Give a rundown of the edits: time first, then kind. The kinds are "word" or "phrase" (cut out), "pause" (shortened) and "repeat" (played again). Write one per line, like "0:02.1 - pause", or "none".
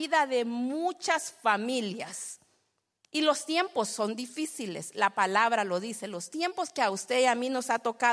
none

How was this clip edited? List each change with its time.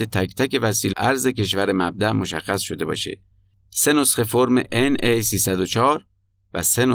0:00.9 - phrase

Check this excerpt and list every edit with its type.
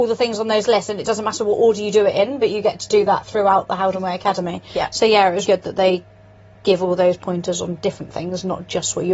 0:05.4 - word

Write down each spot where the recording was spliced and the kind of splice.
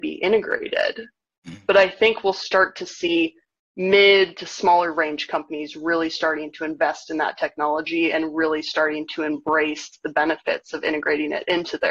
none

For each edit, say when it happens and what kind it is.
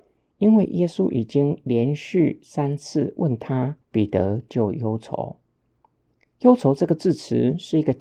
0:03.8 - pause

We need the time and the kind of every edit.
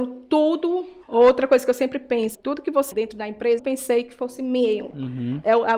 0:01.0 - pause
0:02.3 - word
0:02.9 - word
0:03.6 - phrase

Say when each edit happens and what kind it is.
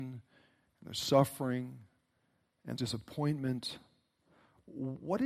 0:02.8 - word

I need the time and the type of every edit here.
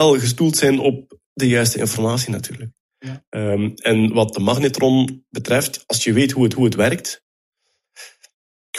0:06.5 - repeat

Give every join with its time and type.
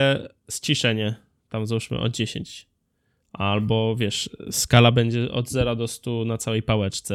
none

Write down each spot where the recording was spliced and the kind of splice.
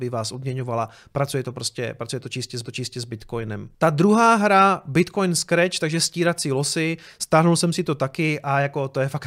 0:02.6 - repeat

